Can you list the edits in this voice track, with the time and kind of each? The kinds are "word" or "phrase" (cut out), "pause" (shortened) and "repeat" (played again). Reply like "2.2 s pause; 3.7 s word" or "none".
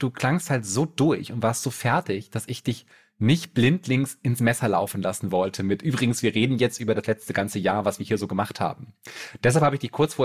none